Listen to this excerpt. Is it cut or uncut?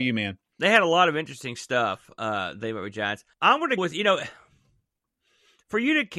cut